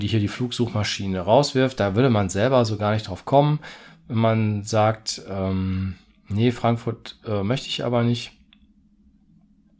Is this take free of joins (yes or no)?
yes